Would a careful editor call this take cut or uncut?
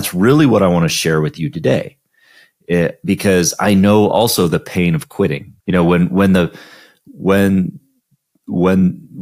cut